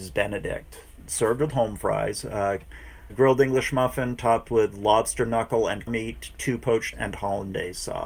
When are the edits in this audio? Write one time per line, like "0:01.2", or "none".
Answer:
0:03.1
0:05.9
0:06.9